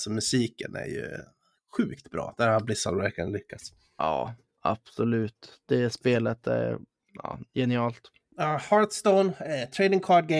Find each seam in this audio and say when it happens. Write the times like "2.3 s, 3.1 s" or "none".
none